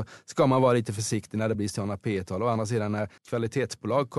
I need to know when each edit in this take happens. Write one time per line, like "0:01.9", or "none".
0:01.5
0:03.2